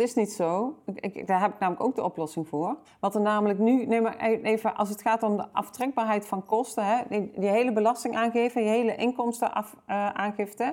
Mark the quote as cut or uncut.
cut